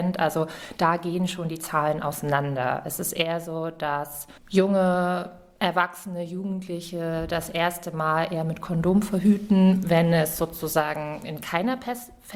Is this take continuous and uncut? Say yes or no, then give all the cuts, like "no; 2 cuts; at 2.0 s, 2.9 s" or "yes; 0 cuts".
no; 1 cut; at 4.4 s